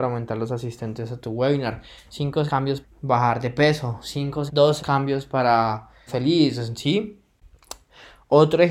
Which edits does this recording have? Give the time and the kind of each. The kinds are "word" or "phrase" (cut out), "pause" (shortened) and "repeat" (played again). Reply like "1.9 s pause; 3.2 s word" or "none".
2.5 s word; 2.8 s word; 4.5 s word; 4.8 s word; 6.1 s word